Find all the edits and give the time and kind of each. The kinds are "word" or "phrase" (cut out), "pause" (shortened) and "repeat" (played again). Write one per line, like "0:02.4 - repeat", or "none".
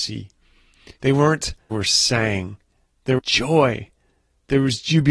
0:01.0 - pause
0:01.7 - phrase
0:03.2 - word